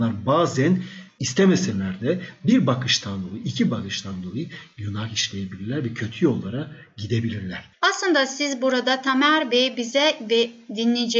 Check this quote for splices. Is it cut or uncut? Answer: uncut